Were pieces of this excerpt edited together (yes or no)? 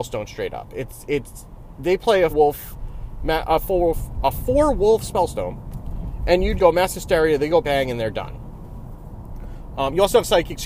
yes